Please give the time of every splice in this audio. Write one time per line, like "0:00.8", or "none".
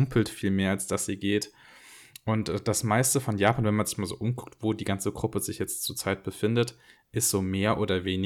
none